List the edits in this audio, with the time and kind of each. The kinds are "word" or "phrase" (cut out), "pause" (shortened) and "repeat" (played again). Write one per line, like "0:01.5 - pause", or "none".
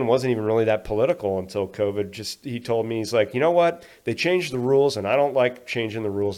none